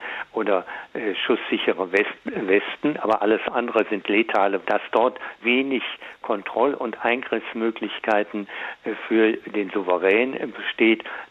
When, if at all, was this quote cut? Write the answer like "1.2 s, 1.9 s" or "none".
4.6 s, 5.4 s